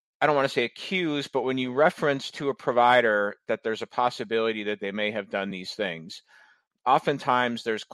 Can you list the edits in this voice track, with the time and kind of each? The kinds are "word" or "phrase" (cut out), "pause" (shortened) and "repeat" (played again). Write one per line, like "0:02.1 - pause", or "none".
none